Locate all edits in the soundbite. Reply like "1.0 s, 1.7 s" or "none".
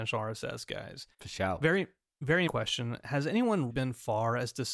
1.1 s, 2.5 s, 3.7 s

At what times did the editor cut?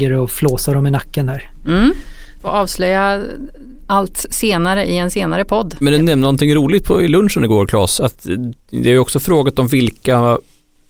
3.8 s

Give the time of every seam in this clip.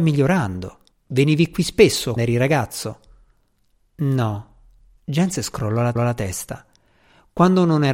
0.9 s, 2.2 s, 6.0 s

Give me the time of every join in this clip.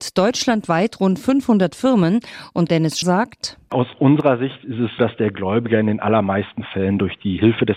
2.7 s, 3.0 s, 5.0 s

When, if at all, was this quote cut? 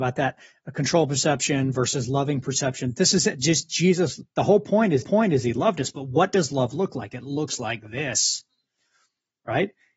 4.3 s, 5.0 s

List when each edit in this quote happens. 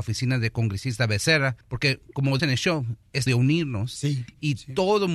1.6 s, 2.4 s, 3.3 s

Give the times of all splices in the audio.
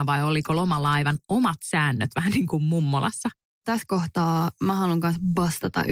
none

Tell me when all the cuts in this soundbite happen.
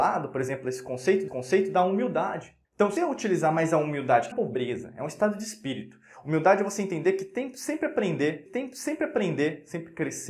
1.3 s, 2.6 s, 3.0 s, 4.3 s, 8.5 s

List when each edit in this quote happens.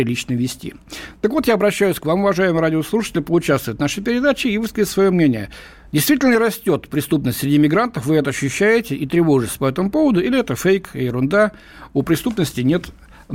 none

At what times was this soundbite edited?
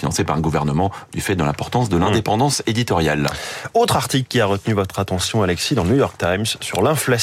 none

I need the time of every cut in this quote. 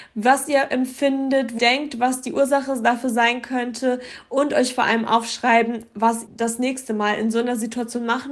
1.6 s, 6.3 s

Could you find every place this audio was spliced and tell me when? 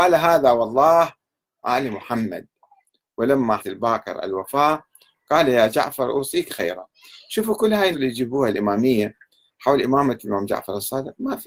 1.6 s, 3.6 s, 6.5 s, 7.9 s

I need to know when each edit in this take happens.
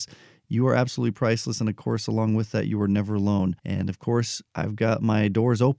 3.6 s, 4.5 s

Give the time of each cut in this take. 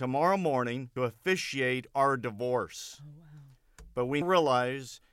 1.0 s, 4.2 s

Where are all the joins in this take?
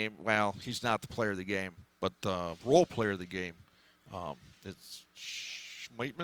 none

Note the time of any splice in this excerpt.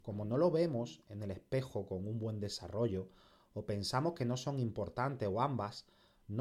none

